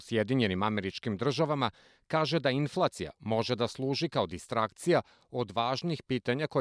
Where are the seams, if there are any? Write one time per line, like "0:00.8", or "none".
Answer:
none